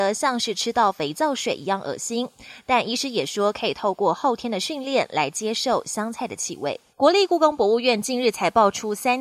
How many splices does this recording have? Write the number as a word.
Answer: one